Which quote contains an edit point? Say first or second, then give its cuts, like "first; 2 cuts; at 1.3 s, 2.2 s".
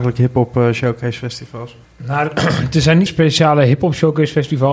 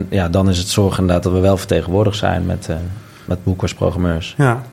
first; 2 cuts; at 1.8 s, 3.1 s